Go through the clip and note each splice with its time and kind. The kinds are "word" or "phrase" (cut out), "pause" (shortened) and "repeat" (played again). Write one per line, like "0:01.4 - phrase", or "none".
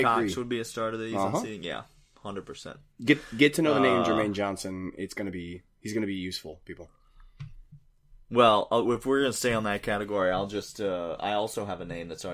none

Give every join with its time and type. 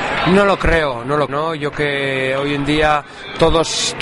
0:01.3 - word
0:01.7 - word

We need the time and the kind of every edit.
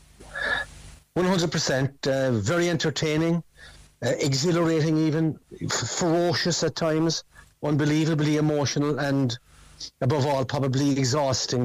none

